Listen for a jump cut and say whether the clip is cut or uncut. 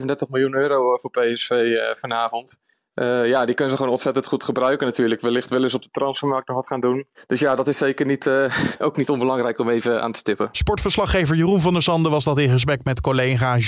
cut